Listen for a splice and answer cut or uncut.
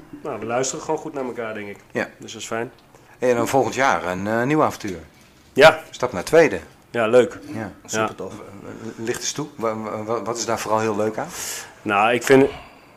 uncut